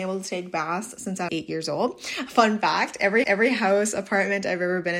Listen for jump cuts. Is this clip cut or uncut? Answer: cut